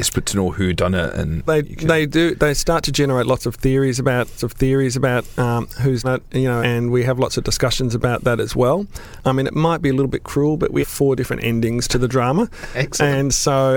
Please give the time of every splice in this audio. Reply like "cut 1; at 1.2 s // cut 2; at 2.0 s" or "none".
cut 1; at 1.5 s // cut 2; at 4.4 s // cut 3; at 6.0 s // cut 4; at 6.6 s // cut 5; at 10.8 s